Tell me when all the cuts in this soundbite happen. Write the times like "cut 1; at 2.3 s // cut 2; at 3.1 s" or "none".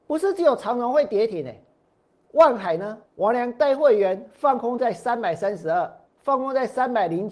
cut 1; at 3.1 s // cut 2; at 6.1 s